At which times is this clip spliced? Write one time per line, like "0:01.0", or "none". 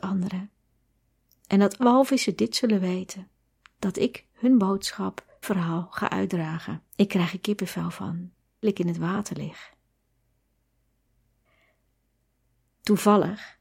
0:01.8
0:03.5
0:04.3
0:05.4
0:06.9
0:08.6